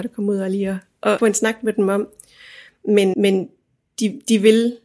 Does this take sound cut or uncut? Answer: cut